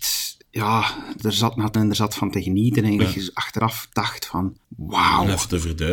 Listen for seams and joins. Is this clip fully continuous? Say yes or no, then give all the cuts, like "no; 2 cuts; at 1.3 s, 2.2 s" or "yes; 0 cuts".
no; 4 cuts; at 1.2 s, 1.7 s, 3.0 s, 4.6 s